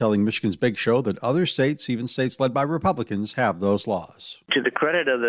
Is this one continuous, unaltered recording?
yes; 0 cuts

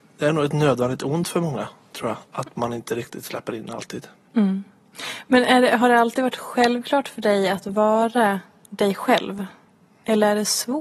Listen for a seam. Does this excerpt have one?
no; 0 cuts

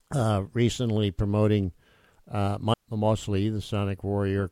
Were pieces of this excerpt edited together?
yes; 1 cut; at 2.7 s

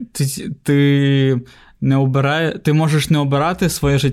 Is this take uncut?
yes; 0 cuts

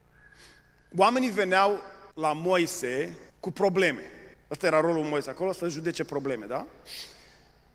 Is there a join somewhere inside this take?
yes; 3 cuts; at 2.1 s, 3.3 s, 4.3 s

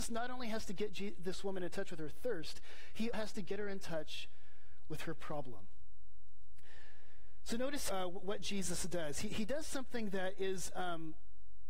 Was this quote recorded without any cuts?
no; 2 cuts; at 3.1 s, 7.9 s

